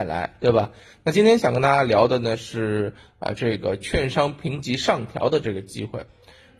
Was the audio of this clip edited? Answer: no; 0 cuts

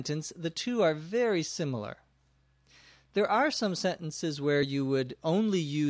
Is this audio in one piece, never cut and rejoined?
yes; 0 cuts

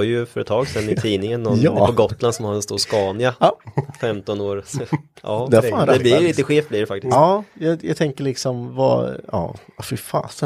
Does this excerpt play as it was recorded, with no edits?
yes; 0 cuts

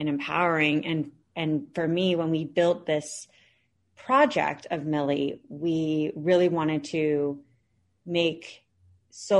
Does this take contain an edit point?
no; 0 cuts

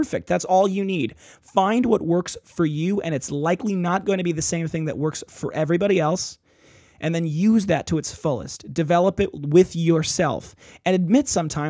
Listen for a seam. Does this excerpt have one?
no; 0 cuts

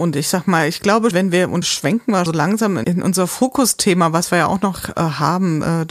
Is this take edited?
yes; 4 cuts; at 1.1 s, 1.6 s, 2.3 s, 2.8 s

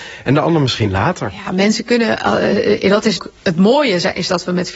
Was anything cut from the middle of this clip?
yes; 1 cut; at 3.2 s

